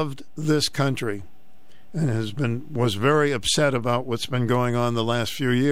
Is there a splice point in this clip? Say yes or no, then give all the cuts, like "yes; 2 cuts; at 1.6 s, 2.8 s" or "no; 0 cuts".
no; 0 cuts